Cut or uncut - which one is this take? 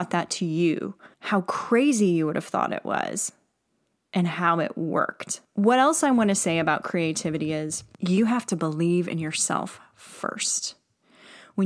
cut